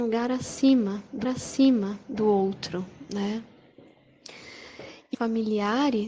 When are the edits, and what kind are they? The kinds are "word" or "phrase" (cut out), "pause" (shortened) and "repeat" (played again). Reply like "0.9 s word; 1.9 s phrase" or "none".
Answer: 1.2 s repeat; 5.1 s phrase